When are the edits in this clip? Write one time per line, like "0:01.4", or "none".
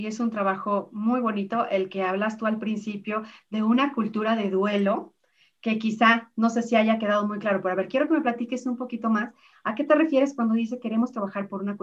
none